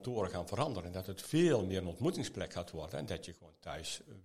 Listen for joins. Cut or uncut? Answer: uncut